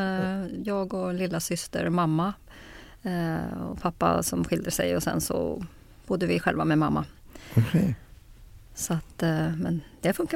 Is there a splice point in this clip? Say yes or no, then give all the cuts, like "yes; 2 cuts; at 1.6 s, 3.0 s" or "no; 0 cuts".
no; 0 cuts